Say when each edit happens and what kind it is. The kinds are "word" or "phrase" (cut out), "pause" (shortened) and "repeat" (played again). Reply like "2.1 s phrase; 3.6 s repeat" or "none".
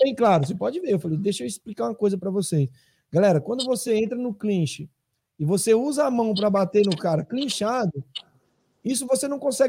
none